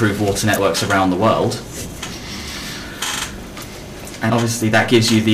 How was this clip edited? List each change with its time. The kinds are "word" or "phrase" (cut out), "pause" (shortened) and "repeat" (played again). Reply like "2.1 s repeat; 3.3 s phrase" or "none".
4.3 s word

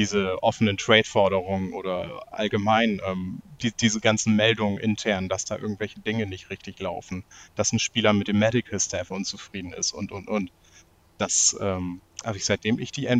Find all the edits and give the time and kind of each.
none

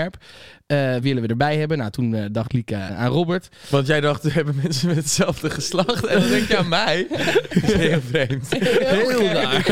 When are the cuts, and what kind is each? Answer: 1.0 s word; 2.9 s word

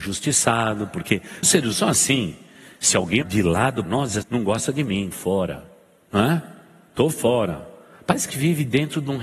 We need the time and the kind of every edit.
1.4 s word; 1.7 s word; 3.2 s word; 3.8 s word; 4.2 s word; 5.1 s word; 8.3 s word

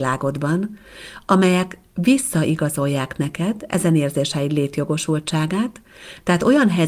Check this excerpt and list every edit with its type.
none

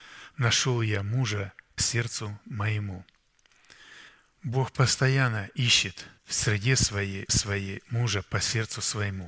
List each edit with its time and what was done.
1.8 s word; 4.1 s pause; 6.2 s pause; 7.3 s repeat

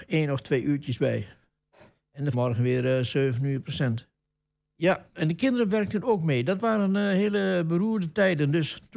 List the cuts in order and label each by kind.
2.3 s word; 4.2 s pause

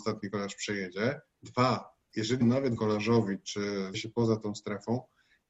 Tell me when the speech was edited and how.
2.4 s word; 2.8 s word; 3.9 s word

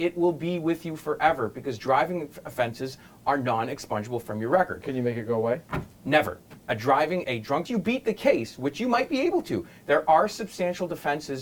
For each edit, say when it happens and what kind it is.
7.2 s word; 7.6 s phrase

